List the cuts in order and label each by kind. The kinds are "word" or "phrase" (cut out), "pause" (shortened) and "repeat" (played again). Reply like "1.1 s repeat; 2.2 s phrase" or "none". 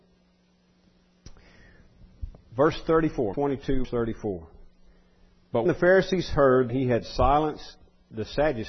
3.3 s word; 3.8 s word; 5.7 s word; 6.7 s word